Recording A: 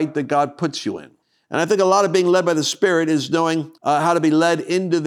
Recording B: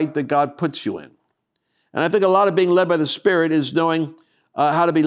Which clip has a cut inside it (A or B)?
A